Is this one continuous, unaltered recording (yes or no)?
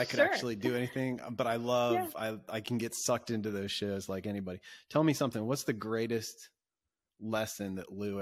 yes